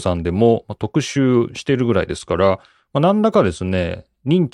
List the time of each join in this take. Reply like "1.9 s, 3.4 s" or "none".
none